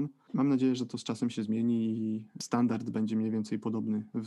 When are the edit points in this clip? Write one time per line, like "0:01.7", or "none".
none